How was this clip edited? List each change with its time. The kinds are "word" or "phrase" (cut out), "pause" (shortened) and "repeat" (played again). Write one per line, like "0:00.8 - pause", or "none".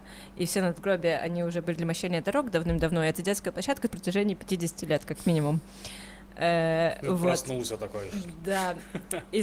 0:01.7 - word
0:03.9 - phrase